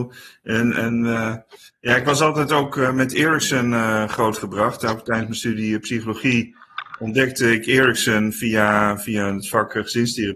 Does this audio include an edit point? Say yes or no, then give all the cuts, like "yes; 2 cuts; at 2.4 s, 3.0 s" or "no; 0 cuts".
no; 0 cuts